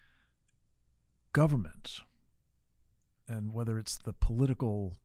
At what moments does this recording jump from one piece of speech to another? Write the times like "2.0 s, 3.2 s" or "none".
4.0 s